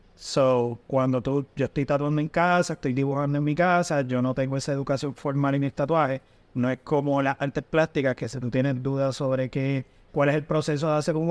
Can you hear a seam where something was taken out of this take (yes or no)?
no